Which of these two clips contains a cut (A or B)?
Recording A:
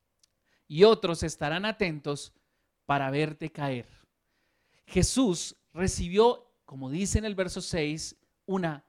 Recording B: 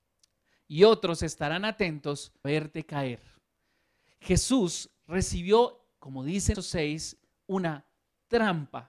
B